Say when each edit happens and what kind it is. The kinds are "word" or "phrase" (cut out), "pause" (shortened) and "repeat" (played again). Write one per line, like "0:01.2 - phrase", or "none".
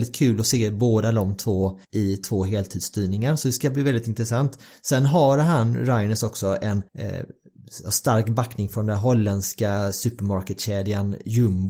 0:01.8 - pause
0:06.9 - pause